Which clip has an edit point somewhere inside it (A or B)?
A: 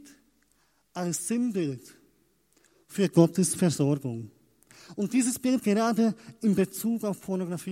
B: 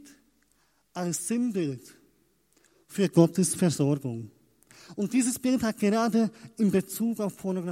A